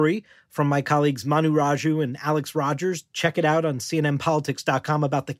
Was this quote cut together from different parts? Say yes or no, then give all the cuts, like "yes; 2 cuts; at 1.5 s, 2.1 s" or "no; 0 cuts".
no; 0 cuts